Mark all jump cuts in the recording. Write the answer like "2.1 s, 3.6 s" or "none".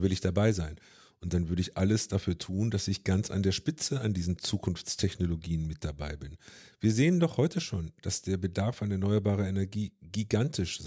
none

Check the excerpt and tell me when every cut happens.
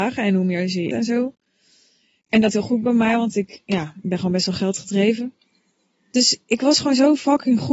0.9 s, 2.5 s, 6.4 s

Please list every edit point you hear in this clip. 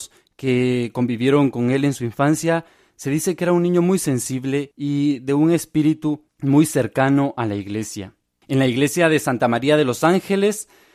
6.3 s

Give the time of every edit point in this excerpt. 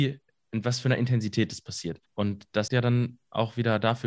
2.1 s, 2.7 s

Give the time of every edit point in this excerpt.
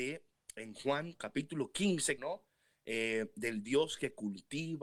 2.2 s

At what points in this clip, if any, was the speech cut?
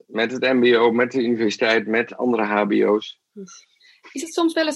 none

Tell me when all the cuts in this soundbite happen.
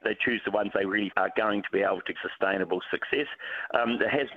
1.1 s, 2.1 s

